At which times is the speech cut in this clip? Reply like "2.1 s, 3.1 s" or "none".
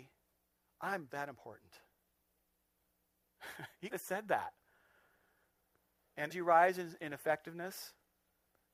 1.1 s, 3.9 s, 6.3 s